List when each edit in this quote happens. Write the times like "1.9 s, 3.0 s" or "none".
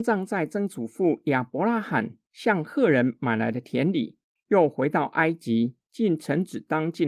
none